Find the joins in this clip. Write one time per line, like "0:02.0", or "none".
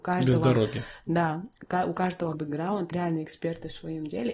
0:02.3
0:02.9